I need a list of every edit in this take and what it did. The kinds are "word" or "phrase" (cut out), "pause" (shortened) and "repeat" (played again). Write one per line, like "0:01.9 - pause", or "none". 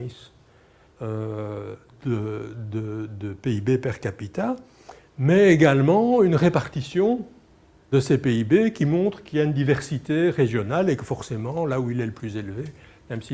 0:07.9 - word

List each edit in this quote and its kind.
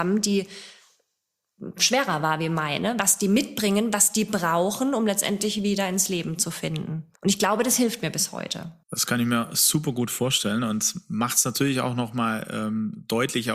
0:07.1 - pause
0:08.8 - pause

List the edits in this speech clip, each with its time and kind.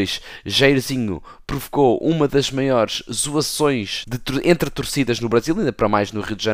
0:04.0 - word

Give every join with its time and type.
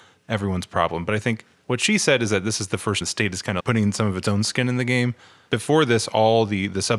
0:03.0 - word
0:03.6 - word

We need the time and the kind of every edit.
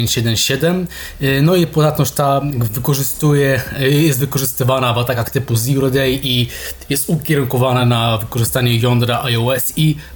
none

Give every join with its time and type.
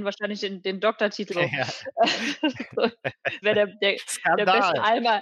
0:01.3 - phrase
0:03.4 - word

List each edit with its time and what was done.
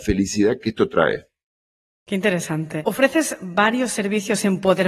none

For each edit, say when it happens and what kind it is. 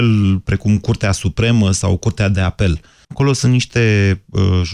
0:03.0 - pause

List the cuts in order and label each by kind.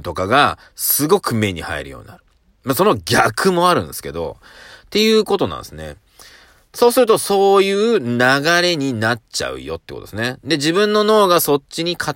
none

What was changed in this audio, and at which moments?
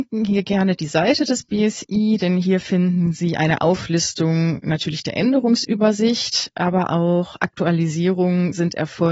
none

